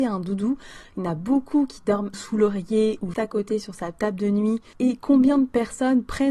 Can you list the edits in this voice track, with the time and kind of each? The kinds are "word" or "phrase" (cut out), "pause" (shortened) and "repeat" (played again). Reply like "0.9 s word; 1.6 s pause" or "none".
2.1 s phrase; 3.1 s word

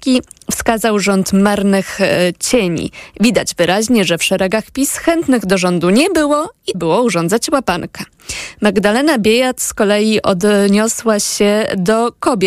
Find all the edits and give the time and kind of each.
6.7 s word

